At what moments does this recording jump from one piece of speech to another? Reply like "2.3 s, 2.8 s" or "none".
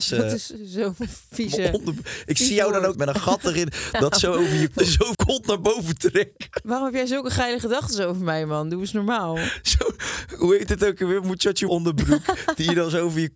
2.9 s, 4.8 s, 5.1 s, 11.7 s